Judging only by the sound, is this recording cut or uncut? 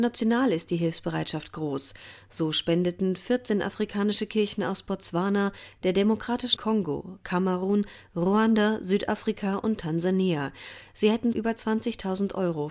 cut